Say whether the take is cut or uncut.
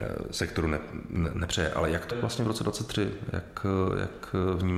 cut